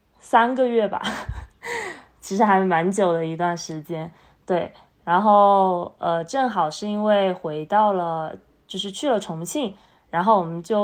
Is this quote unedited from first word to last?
yes; 0 cuts

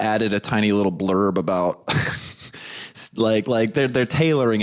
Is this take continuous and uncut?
yes; 0 cuts

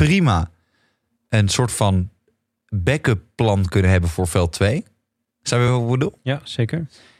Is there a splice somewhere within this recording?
no; 0 cuts

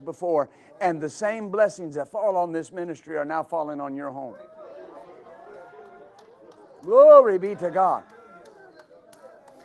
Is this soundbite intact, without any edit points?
yes; 0 cuts

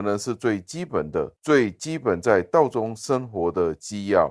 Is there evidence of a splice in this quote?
yes; 1 cut; at 1.4 s

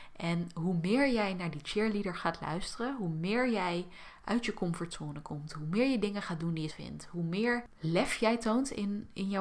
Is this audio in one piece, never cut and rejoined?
no; 1 cut; at 6.7 s

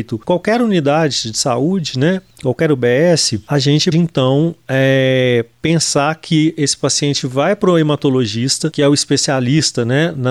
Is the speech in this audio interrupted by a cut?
yes; 2 cuts; at 2.3 s, 3.9 s

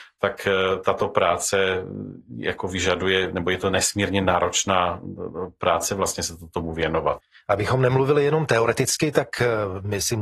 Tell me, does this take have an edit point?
no; 0 cuts

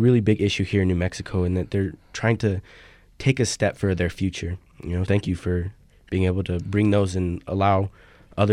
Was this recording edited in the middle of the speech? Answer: yes; 1 cut; at 5.1 s

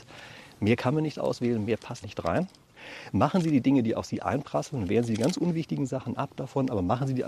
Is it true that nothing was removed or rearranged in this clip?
no; 1 cut; at 2.0 s

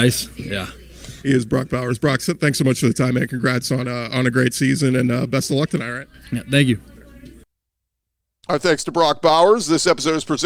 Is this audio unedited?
yes; 0 cuts

